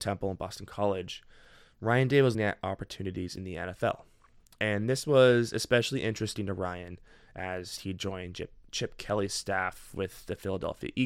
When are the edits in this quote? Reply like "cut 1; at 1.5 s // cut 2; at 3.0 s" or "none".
cut 1; at 2.3 s

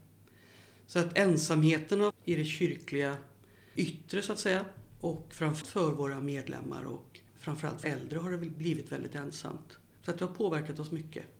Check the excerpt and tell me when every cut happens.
cut 1; at 2.1 s // cut 2; at 3.8 s // cut 3; at 5.6 s // cut 4; at 7.8 s

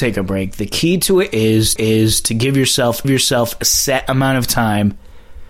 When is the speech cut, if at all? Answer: cut 1; at 1.8 s // cut 2; at 3.0 s

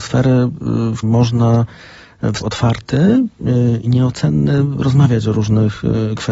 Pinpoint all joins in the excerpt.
cut 1; at 1.0 s // cut 2; at 2.4 s

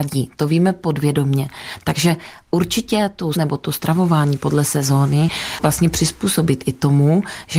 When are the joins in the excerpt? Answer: cut 1; at 3.3 s

